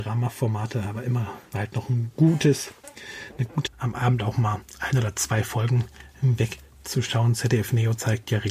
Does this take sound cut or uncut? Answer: cut